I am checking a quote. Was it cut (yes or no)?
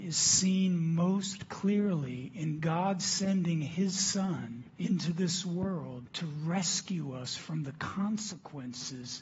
yes